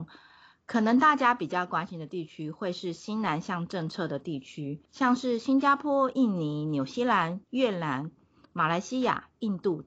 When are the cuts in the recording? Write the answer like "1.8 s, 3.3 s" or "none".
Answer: 4.9 s, 7.4 s